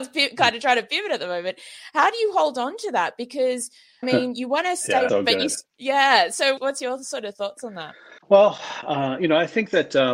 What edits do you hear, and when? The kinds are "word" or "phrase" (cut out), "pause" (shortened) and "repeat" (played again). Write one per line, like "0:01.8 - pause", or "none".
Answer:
0:04.0 - word
0:05.1 - word
0:05.7 - pause
0:06.6 - word
0:08.2 - pause